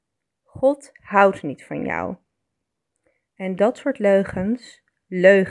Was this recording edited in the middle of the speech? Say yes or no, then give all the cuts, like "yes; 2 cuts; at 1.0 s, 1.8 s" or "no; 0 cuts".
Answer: no; 0 cuts